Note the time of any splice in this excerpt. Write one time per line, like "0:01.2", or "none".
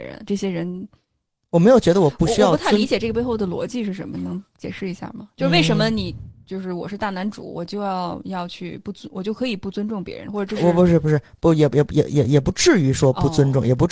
none